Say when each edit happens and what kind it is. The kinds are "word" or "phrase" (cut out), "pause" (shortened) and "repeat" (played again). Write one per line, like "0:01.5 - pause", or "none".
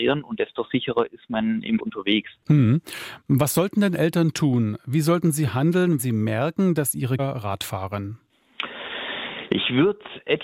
0:01.8 - word
0:06.0 - word
0:07.2 - phrase